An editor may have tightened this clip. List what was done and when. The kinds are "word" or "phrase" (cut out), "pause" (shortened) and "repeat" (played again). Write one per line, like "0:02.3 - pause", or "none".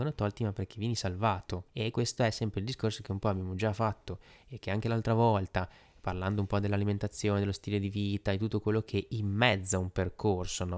0:01.7 - pause